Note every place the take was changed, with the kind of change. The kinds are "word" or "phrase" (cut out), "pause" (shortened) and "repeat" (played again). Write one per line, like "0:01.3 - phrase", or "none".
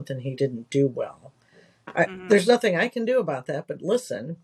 none